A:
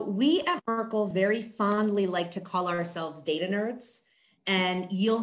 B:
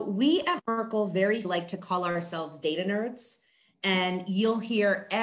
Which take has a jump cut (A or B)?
B